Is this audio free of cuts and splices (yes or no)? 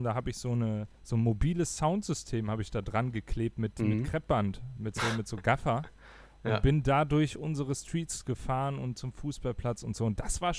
no